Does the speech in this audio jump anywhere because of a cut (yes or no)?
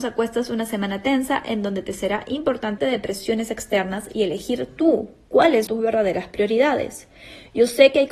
yes